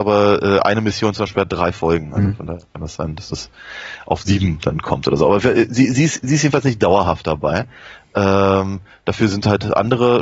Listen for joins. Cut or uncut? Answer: uncut